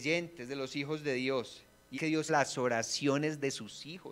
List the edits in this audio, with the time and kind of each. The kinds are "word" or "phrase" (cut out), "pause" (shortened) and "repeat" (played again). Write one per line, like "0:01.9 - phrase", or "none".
0:01.9 - word
0:02.3 - word